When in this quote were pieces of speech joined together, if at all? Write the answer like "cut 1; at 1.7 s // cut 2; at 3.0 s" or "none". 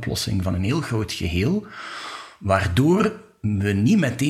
none